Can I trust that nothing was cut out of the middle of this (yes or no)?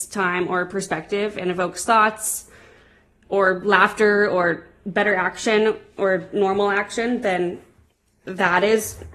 yes